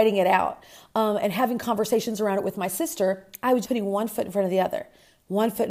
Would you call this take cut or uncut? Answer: cut